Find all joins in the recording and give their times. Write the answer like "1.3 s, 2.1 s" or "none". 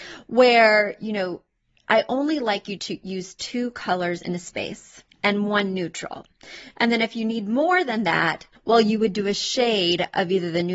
2.8 s, 5.1 s, 8.6 s